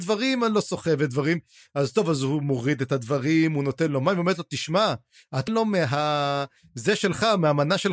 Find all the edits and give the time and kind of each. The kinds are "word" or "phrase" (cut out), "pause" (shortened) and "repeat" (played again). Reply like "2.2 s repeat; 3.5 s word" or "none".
5.5 s word